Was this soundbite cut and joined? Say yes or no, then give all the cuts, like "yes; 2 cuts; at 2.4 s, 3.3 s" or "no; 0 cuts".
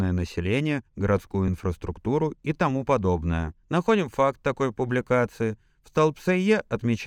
no; 0 cuts